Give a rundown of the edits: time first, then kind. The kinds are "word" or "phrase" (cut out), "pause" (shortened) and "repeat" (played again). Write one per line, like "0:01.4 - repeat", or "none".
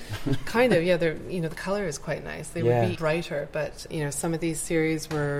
0:03.0 - word
0:03.9 - word